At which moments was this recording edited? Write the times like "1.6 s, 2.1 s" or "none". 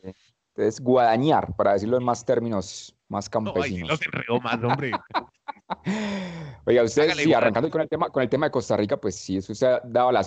3.0 s